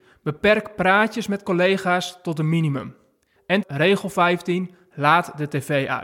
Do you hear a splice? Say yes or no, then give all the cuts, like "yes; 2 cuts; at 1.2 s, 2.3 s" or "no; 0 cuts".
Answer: yes; 1 cut; at 3.6 s